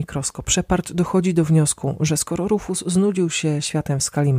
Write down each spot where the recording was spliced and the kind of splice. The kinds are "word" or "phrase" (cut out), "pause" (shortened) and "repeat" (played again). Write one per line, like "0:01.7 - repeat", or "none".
none